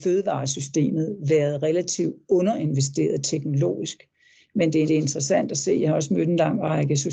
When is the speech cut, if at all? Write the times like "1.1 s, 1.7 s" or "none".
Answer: 4.9 s